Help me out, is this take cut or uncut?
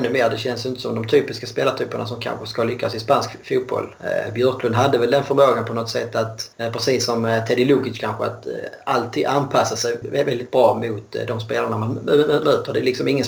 cut